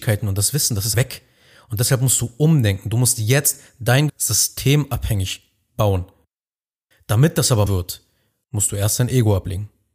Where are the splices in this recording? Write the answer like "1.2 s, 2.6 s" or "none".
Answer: 0.9 s, 4.1 s, 7.7 s